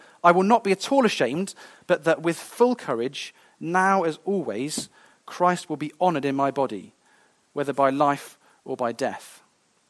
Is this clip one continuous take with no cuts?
yes; 0 cuts

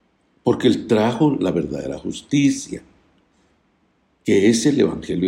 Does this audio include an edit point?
no; 0 cuts

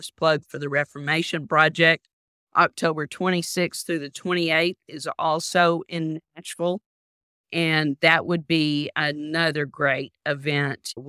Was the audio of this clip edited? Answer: no; 0 cuts

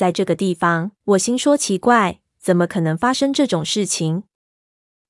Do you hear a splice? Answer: yes; 1 cut; at 1.0 s

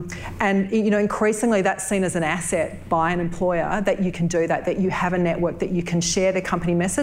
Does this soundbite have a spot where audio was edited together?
no; 0 cuts

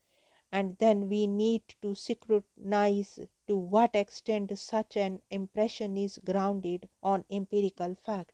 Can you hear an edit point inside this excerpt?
yes; 2 cuts; at 3.4 s, 6.9 s

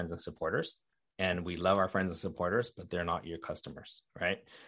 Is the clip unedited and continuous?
yes; 0 cuts

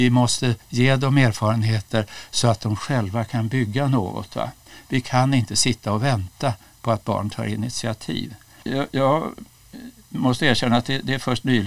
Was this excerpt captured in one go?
yes; 0 cuts

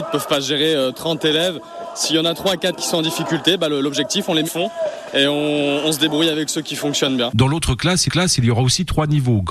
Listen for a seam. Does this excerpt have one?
yes; 2 cuts; at 4.4 s, 8.1 s

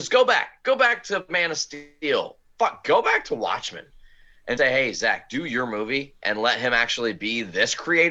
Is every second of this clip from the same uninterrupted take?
no; 1 cut; at 4.6 s

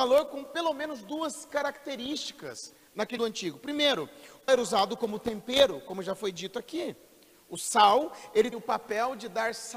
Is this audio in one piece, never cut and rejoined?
no; 3 cuts; at 3.2 s, 4.5 s, 8.5 s

